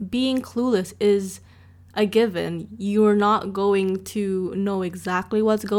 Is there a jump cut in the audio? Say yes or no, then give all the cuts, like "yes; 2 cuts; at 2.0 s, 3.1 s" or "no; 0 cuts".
no; 0 cuts